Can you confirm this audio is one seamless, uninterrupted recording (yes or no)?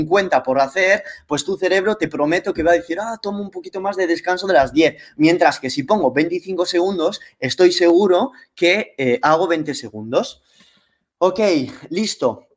yes